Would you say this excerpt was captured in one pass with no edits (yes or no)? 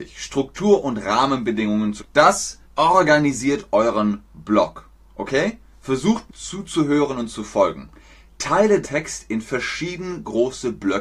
no